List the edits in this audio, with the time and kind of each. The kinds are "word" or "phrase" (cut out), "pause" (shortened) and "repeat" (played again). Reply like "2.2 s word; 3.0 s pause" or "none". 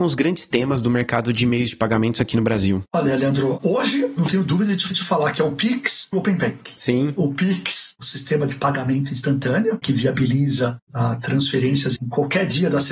4.9 s repeat; 6.1 s word; 9.8 s word; 12.0 s phrase

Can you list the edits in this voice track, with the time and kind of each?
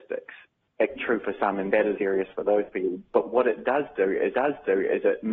1.0 s phrase; 2.0 s word; 4.3 s repeat

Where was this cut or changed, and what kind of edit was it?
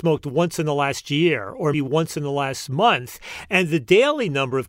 1.7 s word

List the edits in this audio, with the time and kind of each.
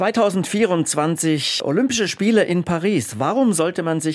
none

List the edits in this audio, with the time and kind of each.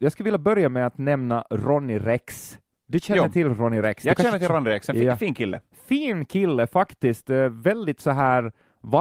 none

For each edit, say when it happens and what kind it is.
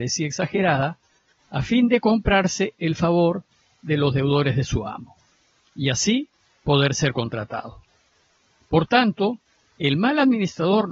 none

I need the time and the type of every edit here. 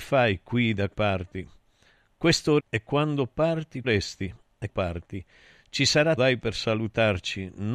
0.9 s word; 2.6 s word; 3.8 s word; 4.7 s word; 6.2 s word

